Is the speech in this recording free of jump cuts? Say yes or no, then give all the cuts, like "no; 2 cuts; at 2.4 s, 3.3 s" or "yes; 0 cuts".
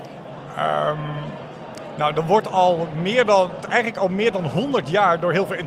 no; 1 cut; at 3.6 s